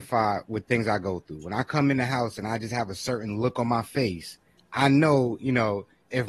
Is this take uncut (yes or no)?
no